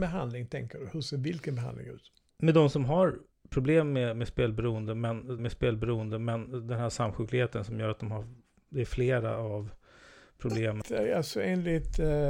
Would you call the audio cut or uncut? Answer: cut